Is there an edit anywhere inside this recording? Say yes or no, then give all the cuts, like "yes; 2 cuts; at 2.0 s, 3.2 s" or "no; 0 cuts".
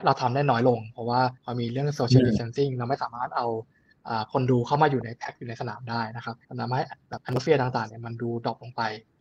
yes; 2 cuts; at 1.4 s, 6.4 s